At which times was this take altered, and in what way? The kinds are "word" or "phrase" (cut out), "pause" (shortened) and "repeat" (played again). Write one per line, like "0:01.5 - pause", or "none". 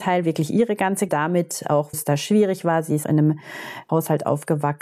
0:01.1 - word
0:01.9 - word
0:03.0 - word
0:03.9 - word